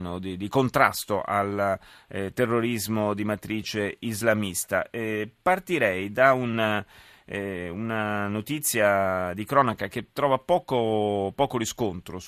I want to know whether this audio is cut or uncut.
uncut